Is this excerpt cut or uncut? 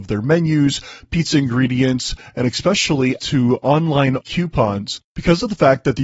cut